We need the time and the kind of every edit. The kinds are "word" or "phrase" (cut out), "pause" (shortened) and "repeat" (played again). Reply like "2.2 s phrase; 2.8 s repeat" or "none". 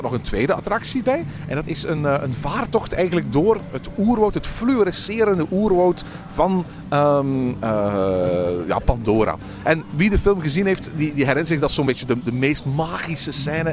none